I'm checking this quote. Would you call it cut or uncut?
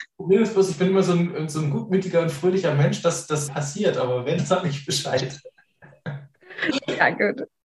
cut